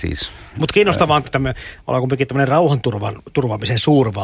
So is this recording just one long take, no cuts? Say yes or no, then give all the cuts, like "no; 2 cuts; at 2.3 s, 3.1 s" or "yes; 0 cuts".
no; 1 cut; at 1.2 s